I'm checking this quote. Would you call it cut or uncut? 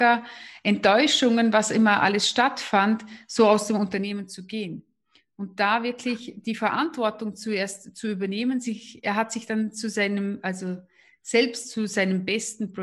uncut